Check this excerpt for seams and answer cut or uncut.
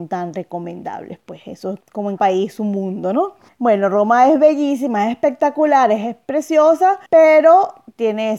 cut